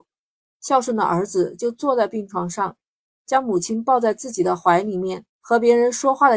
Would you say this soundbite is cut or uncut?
cut